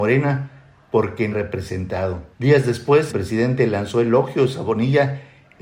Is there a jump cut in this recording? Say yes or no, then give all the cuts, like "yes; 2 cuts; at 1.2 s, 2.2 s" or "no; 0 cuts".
yes; 3 cuts; at 1.3 s, 2.3 s, 3.1 s